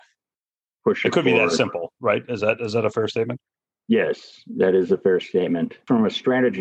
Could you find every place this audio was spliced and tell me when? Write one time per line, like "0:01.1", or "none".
none

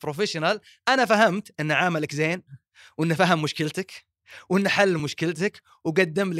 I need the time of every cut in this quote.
none

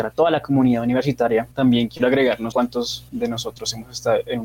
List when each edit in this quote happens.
0:01.5
0:02.5

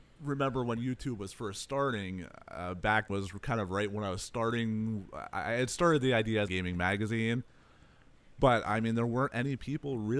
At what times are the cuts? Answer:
0:03.1
0:06.5

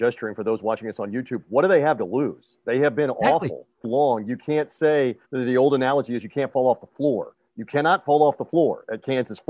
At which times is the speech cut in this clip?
0:03.8
0:05.2

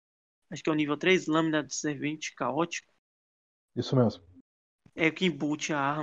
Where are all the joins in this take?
none

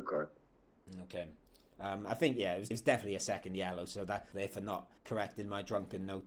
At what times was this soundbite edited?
0:02.7
0:04.3
0:05.0

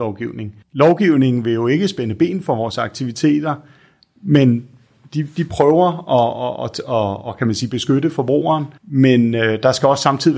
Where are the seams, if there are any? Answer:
0:08.8

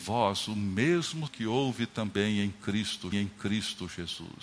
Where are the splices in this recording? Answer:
0:01.3
0:03.1

